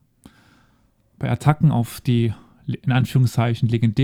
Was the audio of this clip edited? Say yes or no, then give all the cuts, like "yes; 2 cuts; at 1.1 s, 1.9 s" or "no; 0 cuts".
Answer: no; 0 cuts